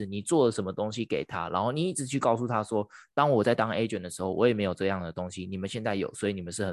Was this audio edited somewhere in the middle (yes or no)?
no